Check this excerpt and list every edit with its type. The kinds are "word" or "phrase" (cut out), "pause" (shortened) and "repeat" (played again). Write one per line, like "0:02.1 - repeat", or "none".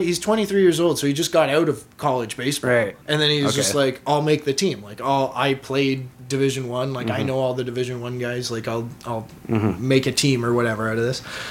0:03.0 - pause
0:06.2 - pause